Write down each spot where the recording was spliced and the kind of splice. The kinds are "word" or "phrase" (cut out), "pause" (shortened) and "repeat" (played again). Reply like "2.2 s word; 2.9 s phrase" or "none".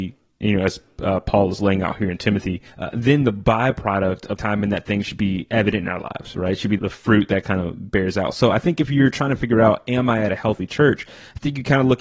2.7 s pause; 4.4 s word; 6.8 s word